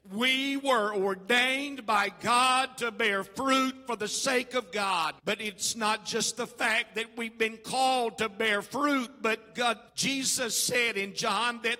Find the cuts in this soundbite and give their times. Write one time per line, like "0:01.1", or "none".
0:05.2
0:09.9